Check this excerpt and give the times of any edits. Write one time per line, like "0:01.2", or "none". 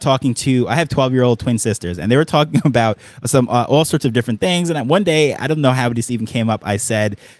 none

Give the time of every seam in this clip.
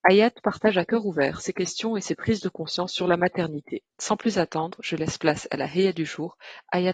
0:03.9

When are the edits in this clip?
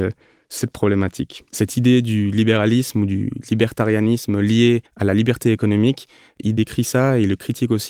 0:01.5
0:04.9

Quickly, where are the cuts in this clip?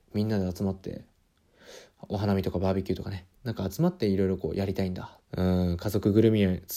0:03.4
0:05.2

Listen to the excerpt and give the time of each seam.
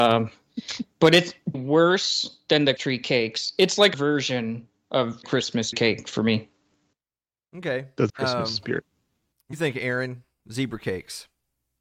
0:01.5
0:02.8
0:03.9
0:05.2
0:05.7
0:08.1
0:09.5

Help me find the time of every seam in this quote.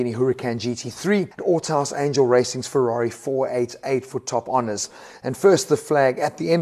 0:01.4

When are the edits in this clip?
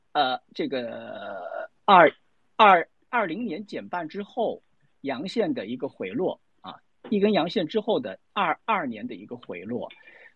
none

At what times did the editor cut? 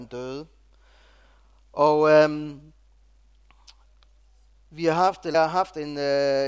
0:05.3

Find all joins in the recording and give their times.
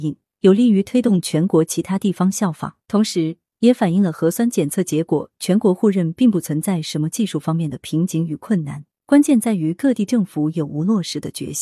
0:02.8
0:08.9

